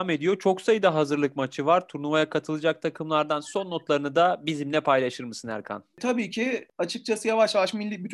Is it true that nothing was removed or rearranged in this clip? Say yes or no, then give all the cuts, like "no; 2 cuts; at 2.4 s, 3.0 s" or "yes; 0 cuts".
yes; 0 cuts